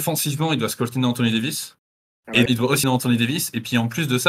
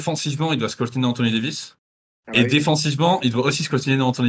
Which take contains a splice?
first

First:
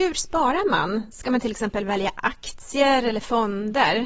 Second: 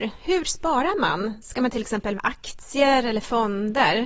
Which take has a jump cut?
second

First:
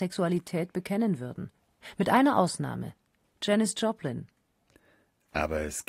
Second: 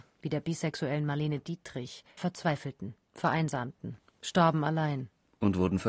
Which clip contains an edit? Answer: second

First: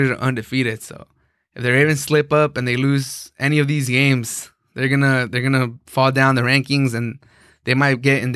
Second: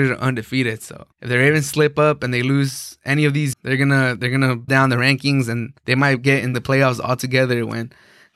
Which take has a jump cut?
second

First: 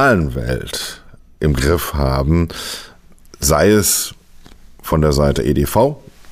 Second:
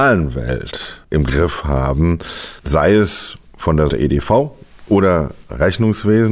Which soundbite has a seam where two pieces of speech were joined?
second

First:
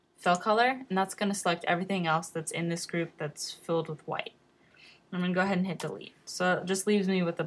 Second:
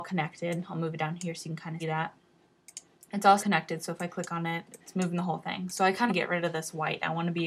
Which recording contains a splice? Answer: second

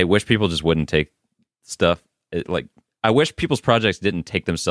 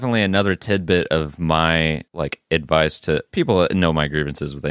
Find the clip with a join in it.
second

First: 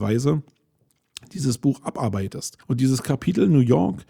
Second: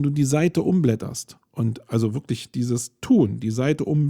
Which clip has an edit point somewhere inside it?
first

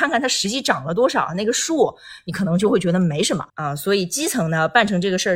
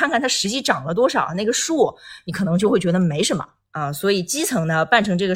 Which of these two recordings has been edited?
first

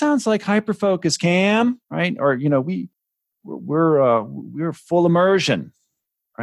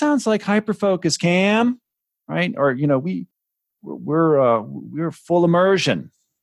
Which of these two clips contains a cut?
first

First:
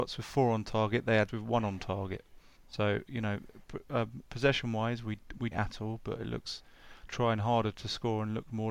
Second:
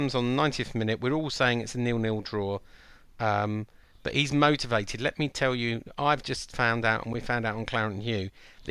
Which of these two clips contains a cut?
first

